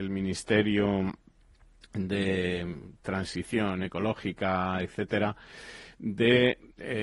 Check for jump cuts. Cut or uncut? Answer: uncut